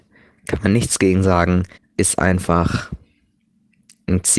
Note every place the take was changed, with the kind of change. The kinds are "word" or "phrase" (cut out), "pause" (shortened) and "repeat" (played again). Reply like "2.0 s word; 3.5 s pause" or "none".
1.7 s pause